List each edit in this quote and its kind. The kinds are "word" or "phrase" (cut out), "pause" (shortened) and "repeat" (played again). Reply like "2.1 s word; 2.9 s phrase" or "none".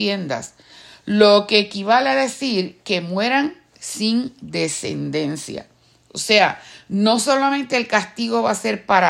none